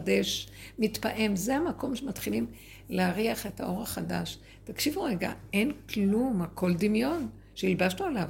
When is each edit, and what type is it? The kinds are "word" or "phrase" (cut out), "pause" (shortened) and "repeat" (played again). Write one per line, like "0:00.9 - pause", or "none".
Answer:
none